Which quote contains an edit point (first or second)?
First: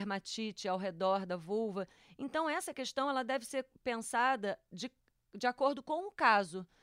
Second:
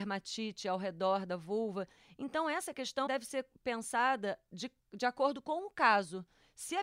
second